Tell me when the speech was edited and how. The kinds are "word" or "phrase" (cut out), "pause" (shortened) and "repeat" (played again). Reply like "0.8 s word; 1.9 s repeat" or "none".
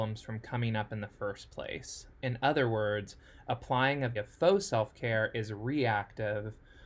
4.2 s word